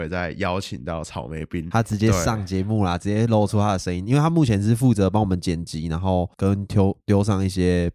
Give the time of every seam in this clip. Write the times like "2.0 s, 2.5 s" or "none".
6.3 s